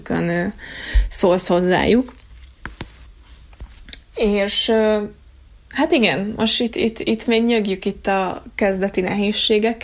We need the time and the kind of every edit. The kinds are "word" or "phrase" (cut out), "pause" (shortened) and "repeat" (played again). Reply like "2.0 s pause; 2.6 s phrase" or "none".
none